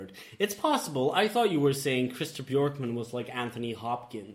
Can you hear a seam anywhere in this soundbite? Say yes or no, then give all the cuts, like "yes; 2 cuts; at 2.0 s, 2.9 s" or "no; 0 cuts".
no; 0 cuts